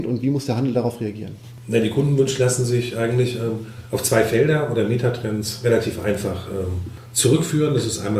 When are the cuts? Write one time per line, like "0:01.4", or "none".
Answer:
none

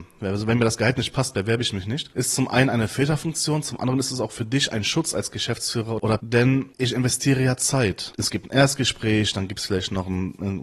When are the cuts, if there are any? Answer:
0:06.2

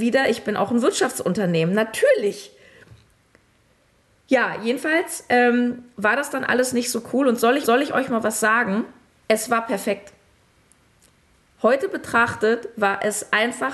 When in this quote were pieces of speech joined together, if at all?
0:07.6
0:09.1

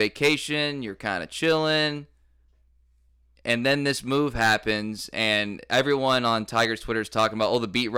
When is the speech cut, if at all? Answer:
none

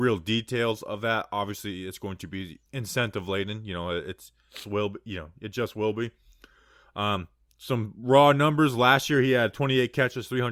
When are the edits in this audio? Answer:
0:02.7
0:04.6

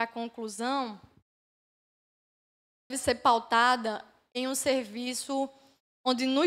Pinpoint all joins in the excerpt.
0:02.9

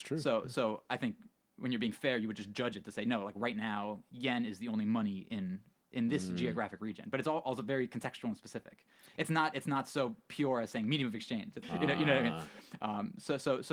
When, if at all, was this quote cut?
0:11.6

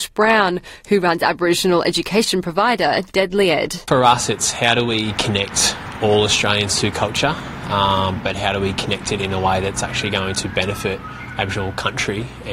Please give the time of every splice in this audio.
none

